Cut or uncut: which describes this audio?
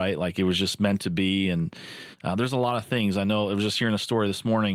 uncut